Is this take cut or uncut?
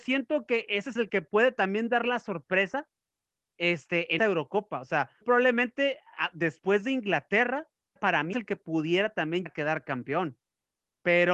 cut